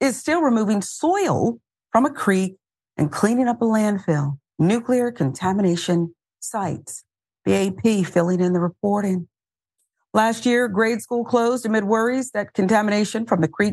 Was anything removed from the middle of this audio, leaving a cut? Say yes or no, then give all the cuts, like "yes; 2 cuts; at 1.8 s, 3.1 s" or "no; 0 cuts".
yes; 1 cut; at 4.5 s